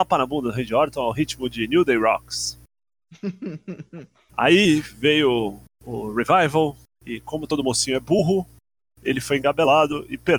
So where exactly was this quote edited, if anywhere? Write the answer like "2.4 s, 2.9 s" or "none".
none